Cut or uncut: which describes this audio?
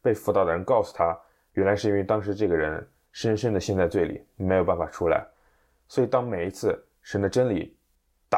uncut